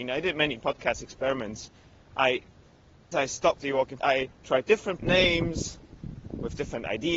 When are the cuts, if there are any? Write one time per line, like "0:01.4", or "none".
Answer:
0:03.1
0:03.6
0:04.0
0:04.3
0:05.0